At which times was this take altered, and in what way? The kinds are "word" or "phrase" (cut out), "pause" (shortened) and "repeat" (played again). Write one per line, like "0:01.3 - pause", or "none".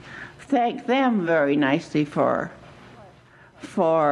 none

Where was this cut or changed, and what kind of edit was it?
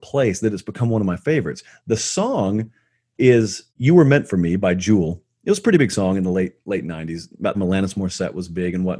0:03.7 - pause
0:07.5 - phrase

